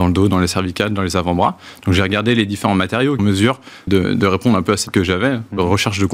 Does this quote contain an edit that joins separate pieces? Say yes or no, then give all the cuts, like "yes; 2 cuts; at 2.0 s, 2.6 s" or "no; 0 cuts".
yes; 3 cuts; at 3.2 s, 3.9 s, 4.9 s